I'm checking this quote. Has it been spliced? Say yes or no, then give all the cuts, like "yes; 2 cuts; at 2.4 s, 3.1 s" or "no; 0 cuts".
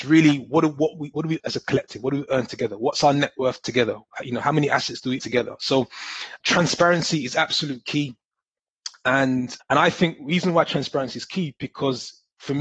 yes; 4 cuts; at 1.4 s, 5.2 s, 6.4 s, 9.6 s